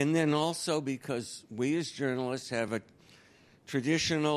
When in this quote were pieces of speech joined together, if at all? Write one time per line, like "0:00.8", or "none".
none